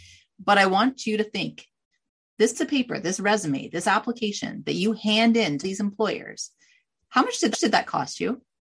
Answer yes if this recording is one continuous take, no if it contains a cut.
no